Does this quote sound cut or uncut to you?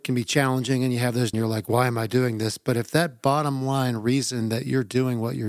cut